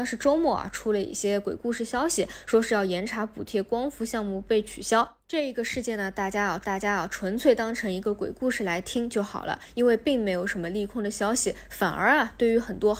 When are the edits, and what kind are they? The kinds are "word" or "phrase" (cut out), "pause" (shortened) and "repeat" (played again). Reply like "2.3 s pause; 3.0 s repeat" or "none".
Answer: 6.6 s repeat